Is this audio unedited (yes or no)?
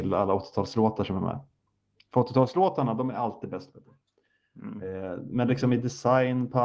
yes